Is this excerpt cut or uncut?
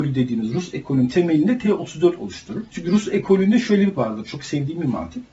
cut